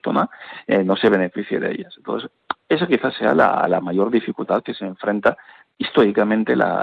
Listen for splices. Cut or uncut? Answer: uncut